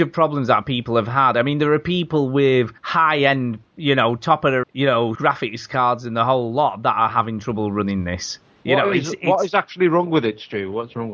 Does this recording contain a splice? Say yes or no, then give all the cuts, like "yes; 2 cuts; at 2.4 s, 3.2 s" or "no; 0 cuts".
yes; 4 cuts; at 2.8 s, 4.6 s, 5.1 s, 8.4 s